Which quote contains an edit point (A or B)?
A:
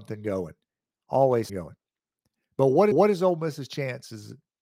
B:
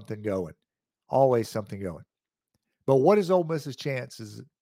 A